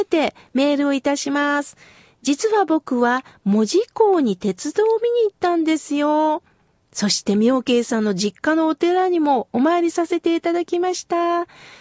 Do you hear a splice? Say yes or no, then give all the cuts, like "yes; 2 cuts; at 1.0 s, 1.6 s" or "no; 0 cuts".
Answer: no; 0 cuts